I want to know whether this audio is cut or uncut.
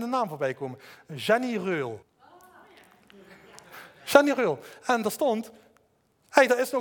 cut